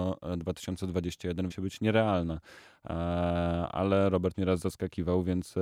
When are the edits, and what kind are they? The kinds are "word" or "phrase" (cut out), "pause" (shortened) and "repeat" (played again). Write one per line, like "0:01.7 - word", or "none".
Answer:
0:01.5 - word
0:04.3 - word